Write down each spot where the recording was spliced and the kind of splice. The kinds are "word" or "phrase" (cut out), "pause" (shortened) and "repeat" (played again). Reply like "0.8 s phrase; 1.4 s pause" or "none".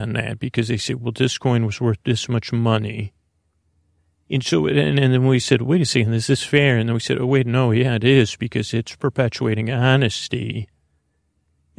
none